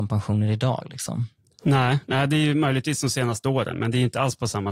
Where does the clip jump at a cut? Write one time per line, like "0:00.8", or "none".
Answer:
none